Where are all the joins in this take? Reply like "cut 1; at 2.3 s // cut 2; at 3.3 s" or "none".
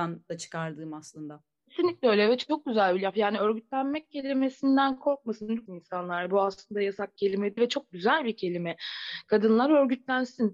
cut 1; at 5.7 s // cut 2; at 7.2 s // cut 3; at 7.6 s